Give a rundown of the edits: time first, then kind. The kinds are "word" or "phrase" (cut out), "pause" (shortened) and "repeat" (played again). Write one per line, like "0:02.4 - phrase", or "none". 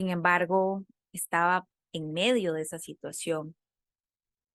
none